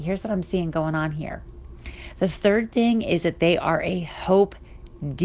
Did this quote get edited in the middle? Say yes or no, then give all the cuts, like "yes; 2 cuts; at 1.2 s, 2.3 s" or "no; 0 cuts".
no; 0 cuts